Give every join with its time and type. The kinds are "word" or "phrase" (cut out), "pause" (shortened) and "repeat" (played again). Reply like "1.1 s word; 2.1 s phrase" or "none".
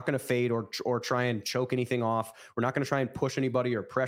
none